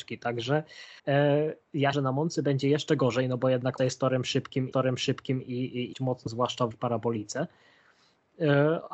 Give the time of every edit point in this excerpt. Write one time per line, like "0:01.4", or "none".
0:01.0
0:01.9
0:03.8
0:04.7
0:05.9
0:06.3
0:06.7